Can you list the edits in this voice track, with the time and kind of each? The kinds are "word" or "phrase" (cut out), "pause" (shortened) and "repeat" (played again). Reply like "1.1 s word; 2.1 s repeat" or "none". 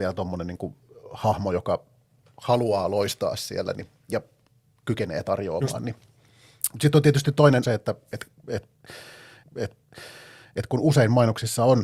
3.7 s word; 7.6 s phrase; 9.4 s repeat